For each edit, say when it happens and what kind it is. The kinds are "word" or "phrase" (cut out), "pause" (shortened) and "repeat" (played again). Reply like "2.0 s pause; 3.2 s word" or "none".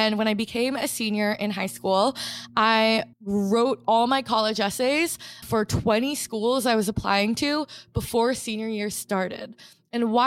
3.1 s pause; 5.4 s word